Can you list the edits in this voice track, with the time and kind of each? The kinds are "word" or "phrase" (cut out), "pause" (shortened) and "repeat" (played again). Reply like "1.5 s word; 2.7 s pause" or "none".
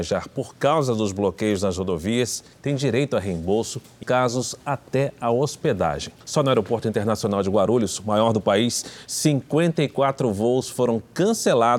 2.5 s pause; 4.0 s word; 6.2 s pause